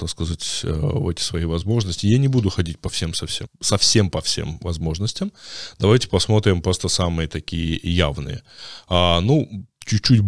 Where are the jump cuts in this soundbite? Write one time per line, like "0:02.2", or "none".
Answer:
0:03.5